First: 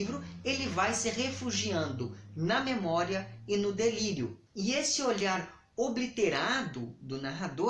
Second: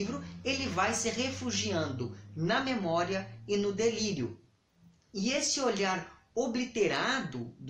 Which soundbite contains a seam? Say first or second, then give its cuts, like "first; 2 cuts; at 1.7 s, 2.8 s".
first; 1 cut; at 4.5 s